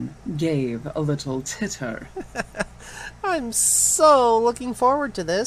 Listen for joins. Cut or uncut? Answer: uncut